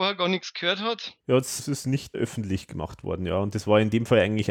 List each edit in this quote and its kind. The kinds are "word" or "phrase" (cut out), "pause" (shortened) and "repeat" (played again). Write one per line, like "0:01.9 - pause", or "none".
0:01.2 - pause
0:01.6 - word
0:02.1 - word